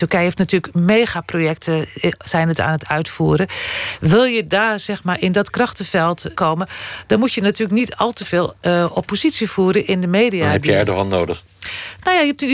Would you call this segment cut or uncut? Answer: cut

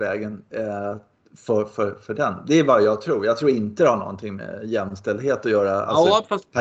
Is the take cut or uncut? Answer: uncut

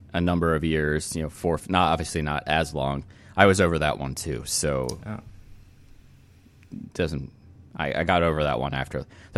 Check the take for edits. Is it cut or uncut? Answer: uncut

